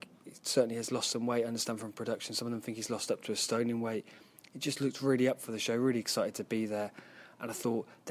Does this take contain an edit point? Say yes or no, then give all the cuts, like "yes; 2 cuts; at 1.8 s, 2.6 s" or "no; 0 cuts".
no; 0 cuts